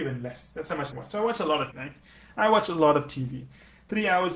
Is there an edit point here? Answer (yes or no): yes